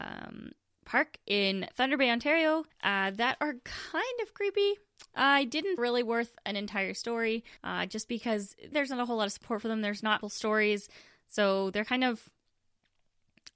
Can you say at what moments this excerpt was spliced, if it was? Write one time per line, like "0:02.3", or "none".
0:02.7
0:05.8
0:07.6
0:08.7
0:10.2

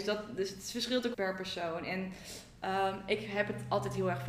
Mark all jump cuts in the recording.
0:01.1

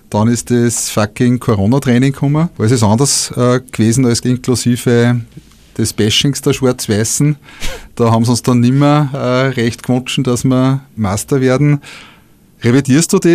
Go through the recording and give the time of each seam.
0:04.2

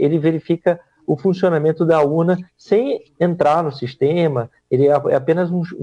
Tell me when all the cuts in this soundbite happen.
none

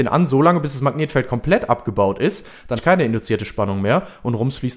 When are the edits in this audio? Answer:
0:02.8

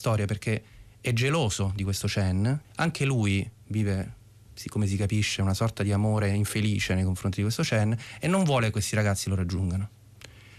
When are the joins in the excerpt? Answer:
0:02.6

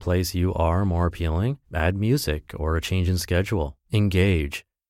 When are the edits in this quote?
0:01.6
0:03.8

